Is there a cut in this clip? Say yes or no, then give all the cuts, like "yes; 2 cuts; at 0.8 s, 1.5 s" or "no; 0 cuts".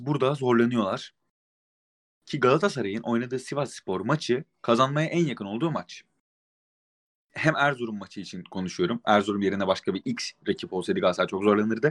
no; 0 cuts